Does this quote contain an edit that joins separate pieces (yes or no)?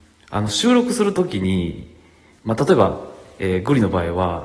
no